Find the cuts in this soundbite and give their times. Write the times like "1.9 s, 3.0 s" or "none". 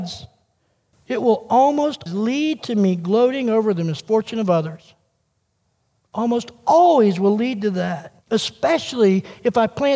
2.1 s, 8.2 s